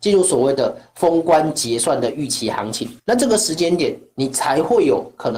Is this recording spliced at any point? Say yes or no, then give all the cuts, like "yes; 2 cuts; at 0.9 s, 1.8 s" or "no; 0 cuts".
yes; 1 cut; at 3.0 s